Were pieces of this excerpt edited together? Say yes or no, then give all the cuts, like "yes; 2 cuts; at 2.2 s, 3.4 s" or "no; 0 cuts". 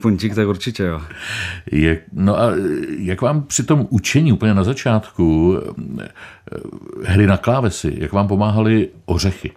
no; 0 cuts